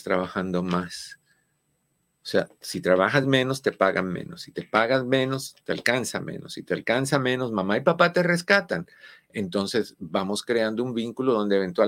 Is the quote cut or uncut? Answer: uncut